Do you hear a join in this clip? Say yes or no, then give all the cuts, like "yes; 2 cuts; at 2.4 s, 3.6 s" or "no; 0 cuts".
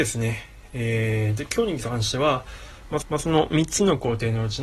yes; 1 cut; at 3.0 s